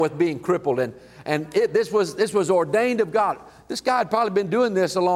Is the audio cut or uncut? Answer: uncut